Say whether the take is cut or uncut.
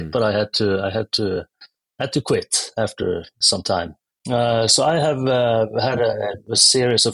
uncut